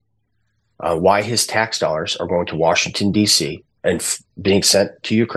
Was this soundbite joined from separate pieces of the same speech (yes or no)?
no